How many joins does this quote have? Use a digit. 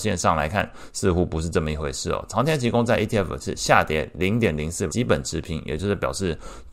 2